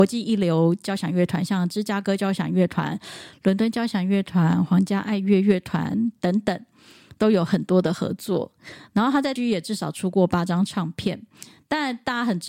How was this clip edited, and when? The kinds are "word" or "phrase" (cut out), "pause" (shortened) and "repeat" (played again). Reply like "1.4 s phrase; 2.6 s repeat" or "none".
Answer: 9.4 s word

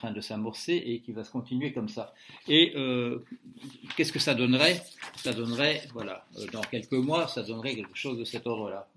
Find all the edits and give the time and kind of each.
none

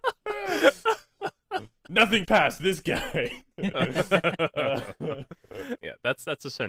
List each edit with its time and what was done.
2.2 s word; 5.8 s word

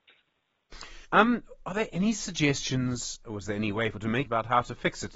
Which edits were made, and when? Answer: 1.1 s pause; 3.9 s word; 4.3 s word

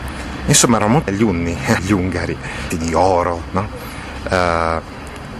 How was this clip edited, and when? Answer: 1.1 s word; 1.8 s word; 2.7 s word

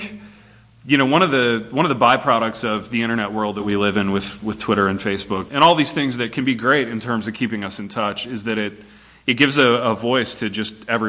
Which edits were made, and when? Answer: 5.5 s word

